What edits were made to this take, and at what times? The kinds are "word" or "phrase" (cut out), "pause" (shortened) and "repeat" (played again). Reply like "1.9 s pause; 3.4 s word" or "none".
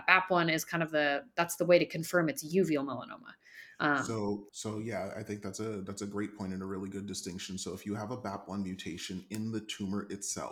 4.5 s pause